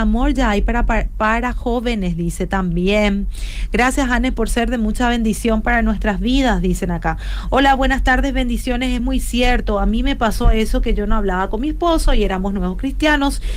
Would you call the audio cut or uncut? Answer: uncut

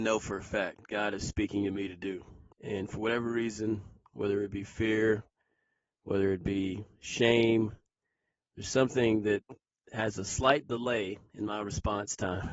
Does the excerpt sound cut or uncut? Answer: cut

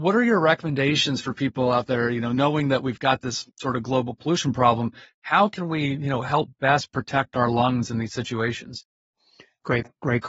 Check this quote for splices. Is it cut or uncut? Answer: uncut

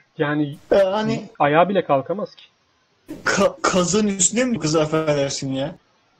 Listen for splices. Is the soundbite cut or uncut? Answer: cut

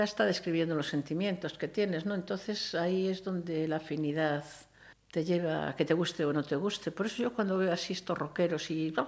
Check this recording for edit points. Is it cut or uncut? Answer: cut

